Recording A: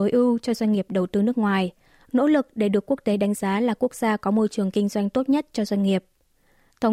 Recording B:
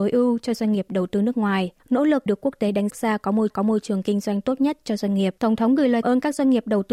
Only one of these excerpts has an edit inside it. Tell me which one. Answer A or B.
B